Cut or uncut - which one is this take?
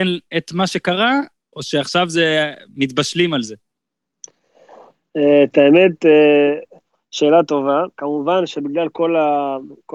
uncut